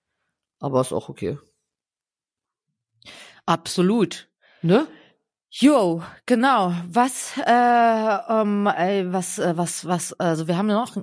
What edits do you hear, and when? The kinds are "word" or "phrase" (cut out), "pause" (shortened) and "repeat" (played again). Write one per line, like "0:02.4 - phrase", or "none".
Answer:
none